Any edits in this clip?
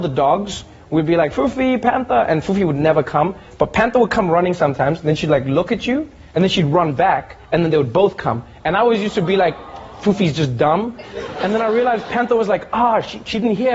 no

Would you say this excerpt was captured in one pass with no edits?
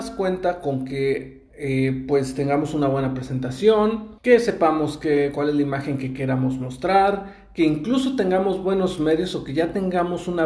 no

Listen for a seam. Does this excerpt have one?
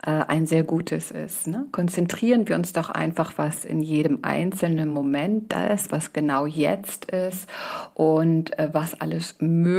no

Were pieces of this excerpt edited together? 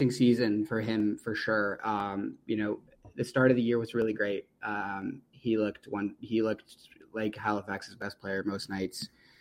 no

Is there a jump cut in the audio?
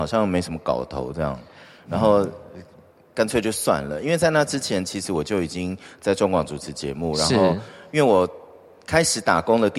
no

